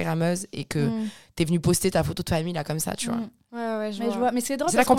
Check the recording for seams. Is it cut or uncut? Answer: uncut